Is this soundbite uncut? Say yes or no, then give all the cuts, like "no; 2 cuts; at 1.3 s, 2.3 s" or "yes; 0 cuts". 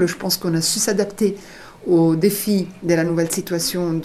yes; 0 cuts